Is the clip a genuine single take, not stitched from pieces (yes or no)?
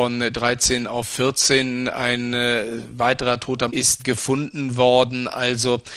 no